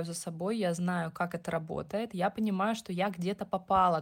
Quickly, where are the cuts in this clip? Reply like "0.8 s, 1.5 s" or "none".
none

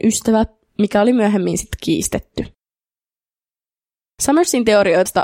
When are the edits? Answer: none

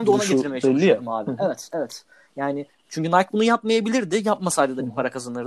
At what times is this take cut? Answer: none

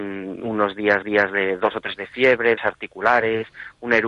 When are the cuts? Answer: 1.0 s, 2.0 s, 2.6 s

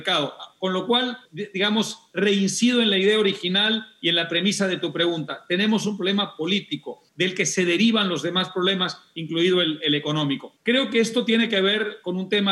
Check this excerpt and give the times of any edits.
1.3 s, 7.1 s, 10.6 s

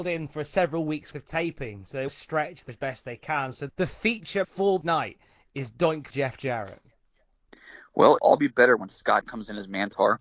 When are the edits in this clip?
1.1 s, 2.1 s, 2.7 s, 3.7 s, 4.4 s, 4.8 s, 6.1 s, 8.2 s, 9.2 s

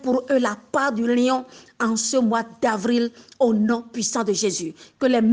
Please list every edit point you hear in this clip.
none

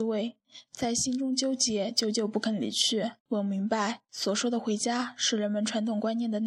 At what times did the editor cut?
3.2 s

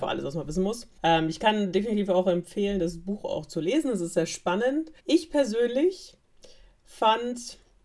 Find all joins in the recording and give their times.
1.0 s, 5.0 s

